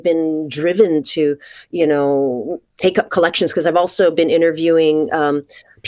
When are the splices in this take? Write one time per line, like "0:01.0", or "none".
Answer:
none

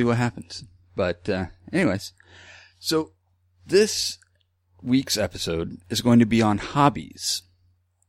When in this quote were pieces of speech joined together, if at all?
none

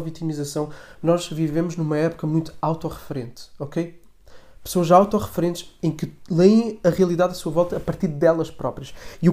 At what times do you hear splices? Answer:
none

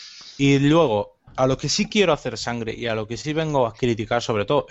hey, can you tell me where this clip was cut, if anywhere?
0:01.3

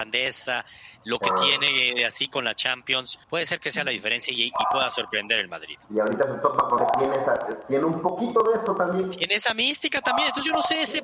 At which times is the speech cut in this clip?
0:03.2
0:06.8

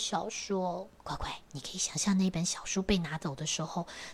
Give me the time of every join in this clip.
0:00.9
0:01.5

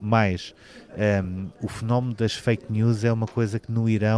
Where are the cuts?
none

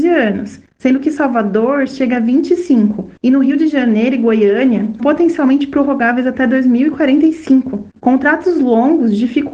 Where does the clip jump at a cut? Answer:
0:03.2
0:05.0
0:07.9

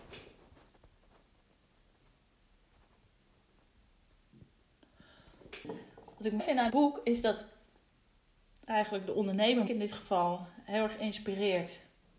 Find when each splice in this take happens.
0:06.4
0:06.7
0:09.7

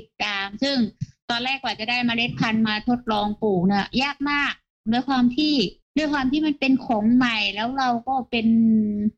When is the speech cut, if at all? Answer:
none

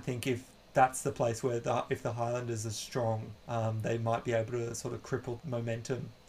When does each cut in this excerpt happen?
0:03.4
0:05.4

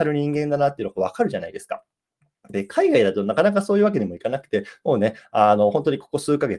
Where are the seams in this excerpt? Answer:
none

